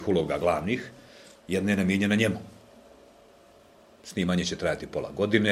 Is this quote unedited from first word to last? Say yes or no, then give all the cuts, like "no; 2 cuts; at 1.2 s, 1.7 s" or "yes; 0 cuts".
yes; 0 cuts